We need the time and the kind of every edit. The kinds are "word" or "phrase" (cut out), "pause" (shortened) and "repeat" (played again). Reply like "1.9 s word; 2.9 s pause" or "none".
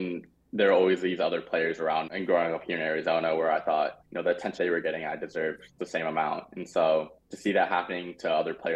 2.1 s word; 4.0 s pause; 4.6 s word; 5.8 s word; 7.2 s pause